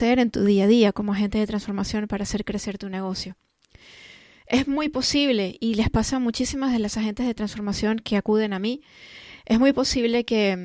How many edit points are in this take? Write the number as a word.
zero